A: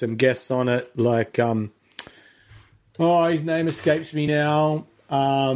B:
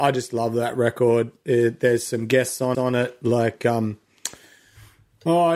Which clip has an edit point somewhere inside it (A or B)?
B